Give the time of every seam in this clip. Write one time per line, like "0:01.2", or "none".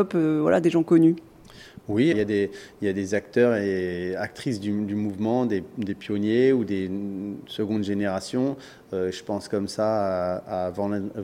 0:02.1